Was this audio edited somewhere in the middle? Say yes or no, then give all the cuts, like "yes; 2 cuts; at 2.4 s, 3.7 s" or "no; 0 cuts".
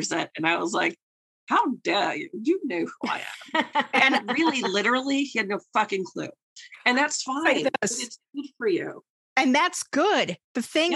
no; 0 cuts